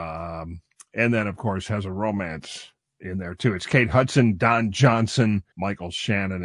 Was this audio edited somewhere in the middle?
yes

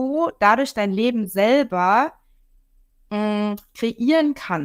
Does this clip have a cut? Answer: no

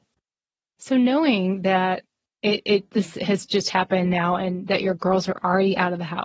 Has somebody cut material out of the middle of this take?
no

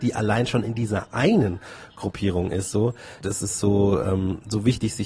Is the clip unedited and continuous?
yes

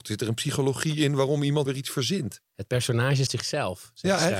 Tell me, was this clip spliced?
yes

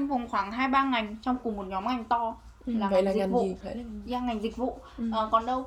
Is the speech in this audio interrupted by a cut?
yes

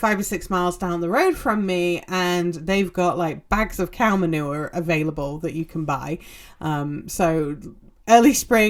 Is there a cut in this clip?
no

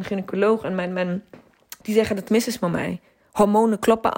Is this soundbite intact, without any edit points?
no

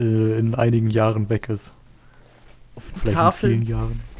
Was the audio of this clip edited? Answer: yes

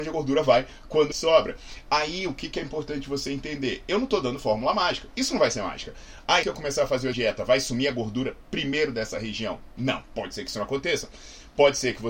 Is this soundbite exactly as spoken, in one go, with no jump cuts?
no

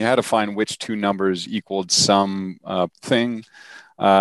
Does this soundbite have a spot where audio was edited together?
yes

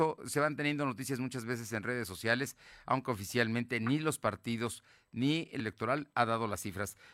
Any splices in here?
yes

